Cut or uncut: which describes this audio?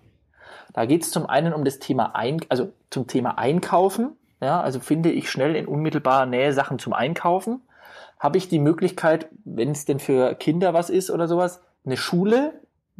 uncut